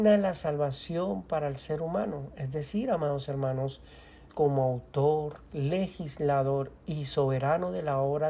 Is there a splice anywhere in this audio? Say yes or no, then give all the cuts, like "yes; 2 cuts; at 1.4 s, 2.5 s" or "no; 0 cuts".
yes; 1 cut; at 4.3 s